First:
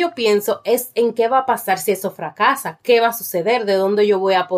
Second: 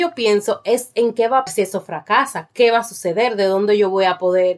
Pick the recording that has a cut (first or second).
second